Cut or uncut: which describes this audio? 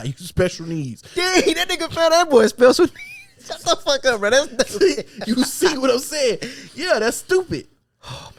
uncut